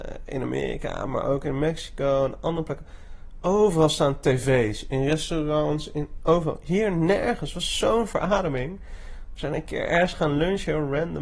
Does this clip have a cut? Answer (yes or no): no